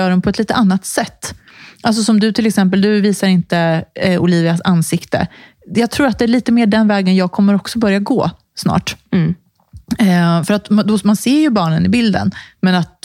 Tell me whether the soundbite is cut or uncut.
uncut